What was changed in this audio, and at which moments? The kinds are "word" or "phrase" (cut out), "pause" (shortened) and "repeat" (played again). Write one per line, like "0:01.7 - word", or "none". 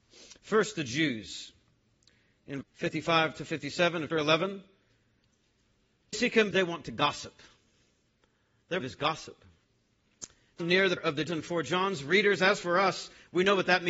0:02.6 - word
0:04.1 - word
0:06.1 - word
0:06.5 - word
0:08.8 - word
0:10.6 - word
0:11.0 - word
0:11.3 - word